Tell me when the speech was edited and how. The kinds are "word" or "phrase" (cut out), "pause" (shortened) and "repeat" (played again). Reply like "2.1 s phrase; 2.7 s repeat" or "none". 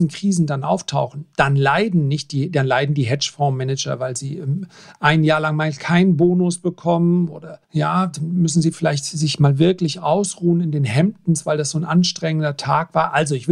7.6 s pause